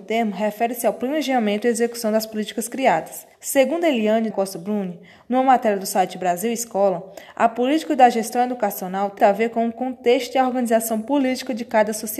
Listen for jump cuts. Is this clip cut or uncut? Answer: cut